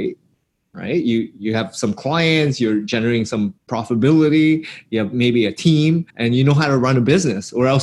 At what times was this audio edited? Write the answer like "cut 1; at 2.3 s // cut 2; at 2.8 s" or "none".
cut 1; at 3.6 s // cut 2; at 6.1 s